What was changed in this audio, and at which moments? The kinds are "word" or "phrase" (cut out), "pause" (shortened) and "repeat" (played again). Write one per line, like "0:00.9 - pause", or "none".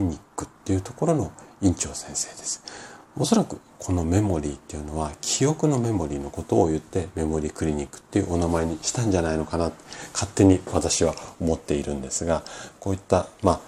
none